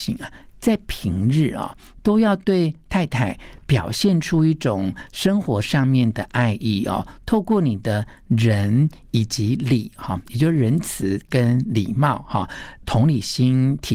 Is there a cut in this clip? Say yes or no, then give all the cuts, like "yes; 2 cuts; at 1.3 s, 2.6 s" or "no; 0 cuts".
yes; 1 cut; at 12.8 s